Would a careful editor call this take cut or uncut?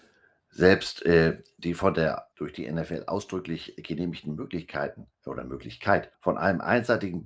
cut